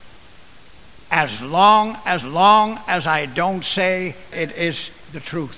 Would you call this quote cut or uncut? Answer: cut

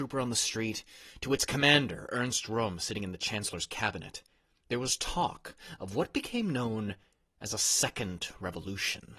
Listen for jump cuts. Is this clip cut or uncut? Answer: uncut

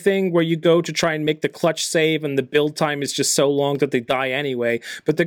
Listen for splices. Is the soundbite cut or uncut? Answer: uncut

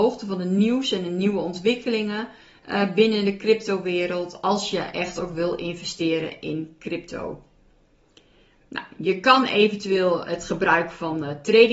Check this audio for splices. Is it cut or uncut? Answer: uncut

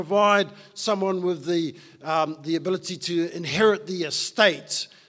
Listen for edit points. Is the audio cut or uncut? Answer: uncut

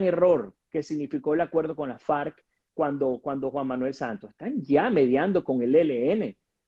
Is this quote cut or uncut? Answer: uncut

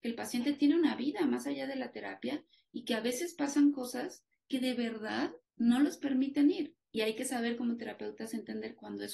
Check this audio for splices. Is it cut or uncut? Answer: cut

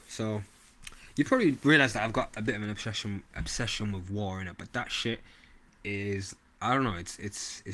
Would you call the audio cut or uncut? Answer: uncut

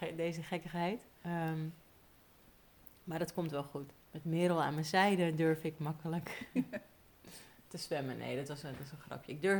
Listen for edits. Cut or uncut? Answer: cut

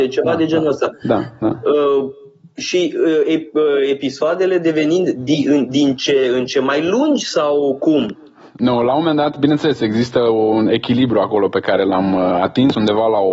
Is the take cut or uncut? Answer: uncut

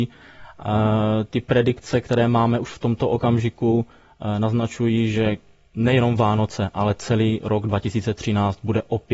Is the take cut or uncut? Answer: uncut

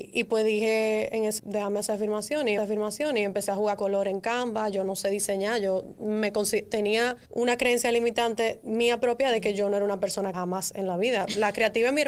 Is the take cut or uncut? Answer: cut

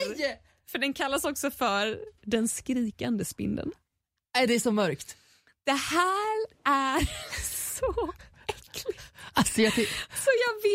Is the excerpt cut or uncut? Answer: uncut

